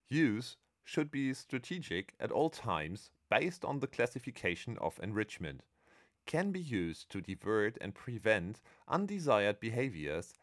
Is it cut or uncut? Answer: uncut